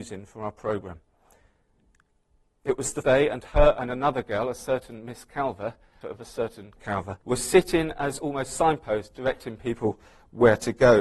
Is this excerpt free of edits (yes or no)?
no